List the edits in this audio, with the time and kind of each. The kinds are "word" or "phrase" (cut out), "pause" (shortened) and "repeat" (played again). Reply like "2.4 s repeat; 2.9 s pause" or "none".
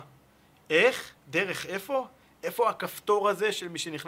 1.2 s pause